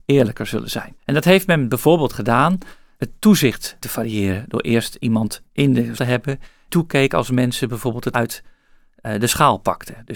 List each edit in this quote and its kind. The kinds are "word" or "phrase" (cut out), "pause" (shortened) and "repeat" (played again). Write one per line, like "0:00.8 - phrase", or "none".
0:01.0 - pause
0:02.9 - word
0:03.8 - phrase
0:05.5 - pause
0:06.0 - word
0:06.7 - word
0:08.1 - word

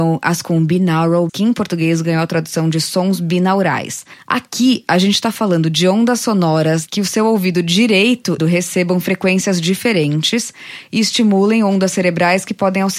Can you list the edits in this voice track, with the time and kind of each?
0:01.3 - word
0:06.9 - phrase
0:08.4 - phrase

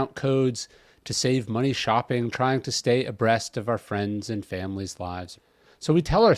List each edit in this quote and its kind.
none

